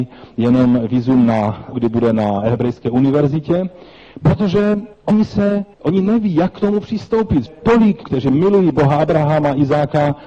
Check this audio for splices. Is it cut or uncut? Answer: cut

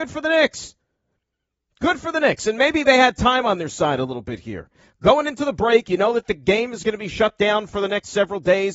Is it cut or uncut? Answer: uncut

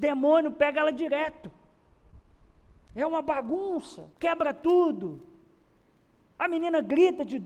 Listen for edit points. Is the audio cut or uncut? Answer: cut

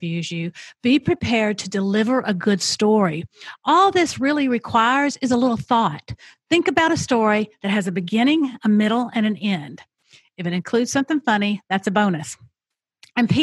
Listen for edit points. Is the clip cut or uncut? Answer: uncut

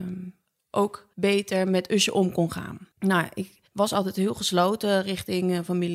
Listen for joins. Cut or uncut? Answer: cut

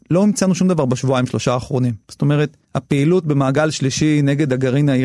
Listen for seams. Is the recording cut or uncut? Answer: cut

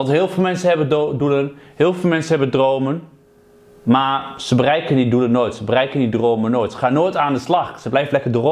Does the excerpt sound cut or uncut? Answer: uncut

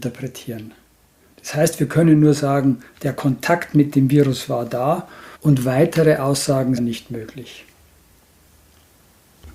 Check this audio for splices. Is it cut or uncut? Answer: cut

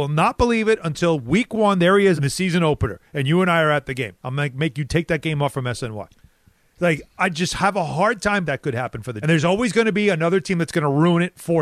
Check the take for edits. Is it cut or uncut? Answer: cut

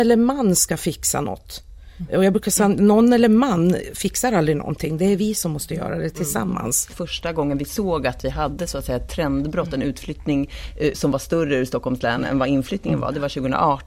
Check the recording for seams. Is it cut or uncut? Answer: cut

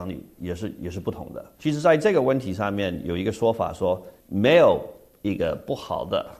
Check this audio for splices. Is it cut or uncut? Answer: cut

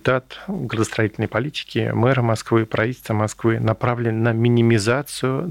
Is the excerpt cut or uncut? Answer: uncut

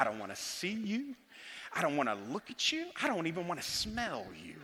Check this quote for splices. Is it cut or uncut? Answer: uncut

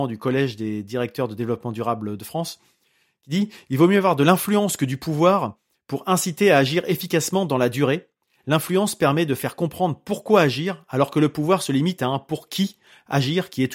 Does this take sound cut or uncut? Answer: uncut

